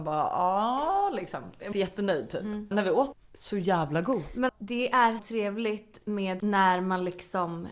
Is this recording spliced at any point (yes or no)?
yes